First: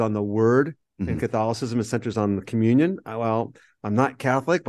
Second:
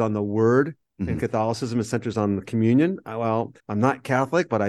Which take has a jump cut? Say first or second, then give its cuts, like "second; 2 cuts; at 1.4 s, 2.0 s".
second; 1 cut; at 3.6 s